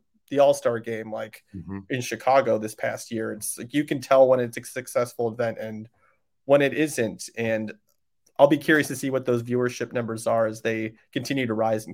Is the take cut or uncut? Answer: uncut